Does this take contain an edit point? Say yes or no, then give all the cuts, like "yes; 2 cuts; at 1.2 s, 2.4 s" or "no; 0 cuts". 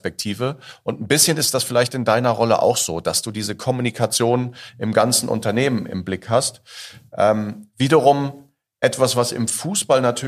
no; 0 cuts